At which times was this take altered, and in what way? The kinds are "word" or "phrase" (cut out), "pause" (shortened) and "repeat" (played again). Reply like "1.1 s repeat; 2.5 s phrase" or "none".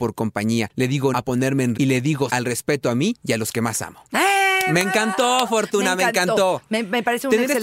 1.1 s word; 1.7 s word; 2.3 s word